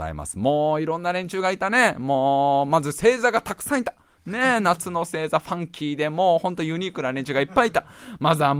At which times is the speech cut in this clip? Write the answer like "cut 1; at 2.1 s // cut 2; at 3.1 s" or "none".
none